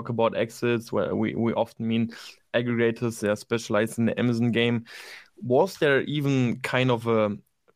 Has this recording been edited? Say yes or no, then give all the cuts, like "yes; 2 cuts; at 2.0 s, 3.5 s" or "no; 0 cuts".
no; 0 cuts